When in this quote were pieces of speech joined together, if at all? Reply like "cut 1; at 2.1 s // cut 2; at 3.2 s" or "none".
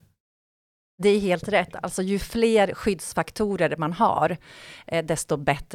none